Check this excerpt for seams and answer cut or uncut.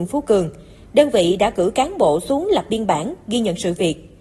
uncut